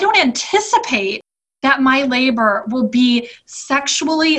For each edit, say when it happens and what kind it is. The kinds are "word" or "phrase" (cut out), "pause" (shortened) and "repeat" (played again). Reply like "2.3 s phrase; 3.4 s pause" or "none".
none